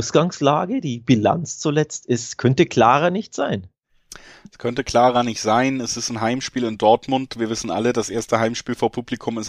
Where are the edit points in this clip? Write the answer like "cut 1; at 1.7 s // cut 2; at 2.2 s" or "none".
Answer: none